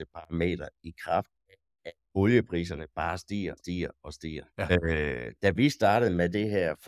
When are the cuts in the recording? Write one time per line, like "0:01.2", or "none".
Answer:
0:02.0
0:03.6
0:04.5